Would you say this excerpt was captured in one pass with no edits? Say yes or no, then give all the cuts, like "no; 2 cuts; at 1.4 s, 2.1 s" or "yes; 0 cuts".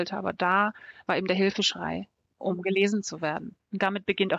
yes; 0 cuts